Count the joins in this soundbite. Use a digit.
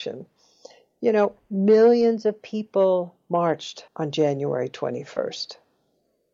1